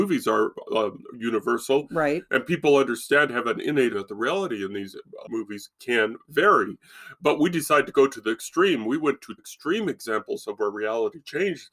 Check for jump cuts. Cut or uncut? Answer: cut